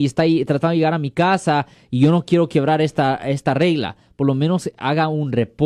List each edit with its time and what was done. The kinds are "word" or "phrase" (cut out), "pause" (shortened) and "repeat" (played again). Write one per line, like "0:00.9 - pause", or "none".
none